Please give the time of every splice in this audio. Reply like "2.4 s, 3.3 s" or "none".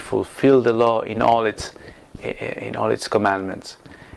none